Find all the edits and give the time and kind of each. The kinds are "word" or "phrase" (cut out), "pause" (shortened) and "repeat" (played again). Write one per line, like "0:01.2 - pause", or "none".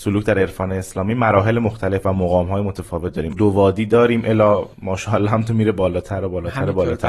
0:03.3 - phrase
0:04.7 - pause